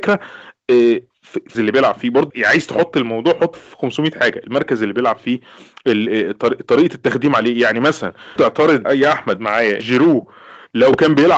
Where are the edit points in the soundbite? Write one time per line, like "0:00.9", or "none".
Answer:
0:01.5
0:02.3
0:03.5
0:08.4
0:08.8
0:09.8